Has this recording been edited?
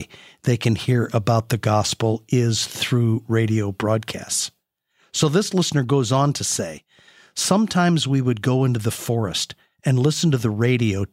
no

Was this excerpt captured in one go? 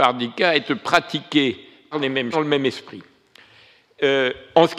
no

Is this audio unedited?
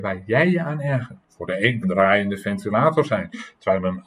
no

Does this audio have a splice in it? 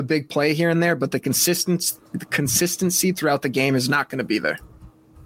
no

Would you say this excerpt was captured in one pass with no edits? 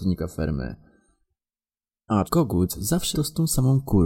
no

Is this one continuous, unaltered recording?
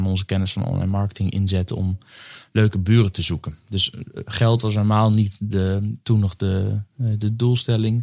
no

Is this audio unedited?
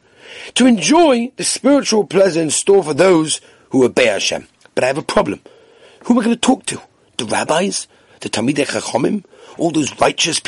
yes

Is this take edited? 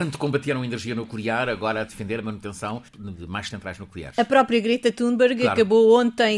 yes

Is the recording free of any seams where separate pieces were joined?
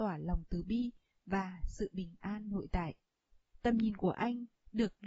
yes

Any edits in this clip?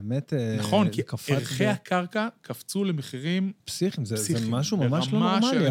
yes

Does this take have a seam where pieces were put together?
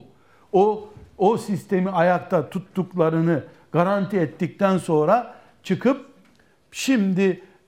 no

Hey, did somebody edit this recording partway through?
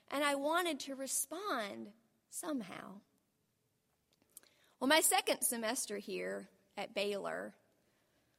no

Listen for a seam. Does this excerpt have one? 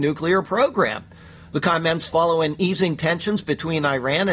no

